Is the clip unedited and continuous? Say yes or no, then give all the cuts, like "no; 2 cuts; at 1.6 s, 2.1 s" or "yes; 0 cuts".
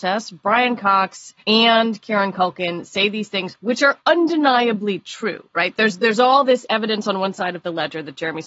no; 2 cuts; at 1.4 s, 4.0 s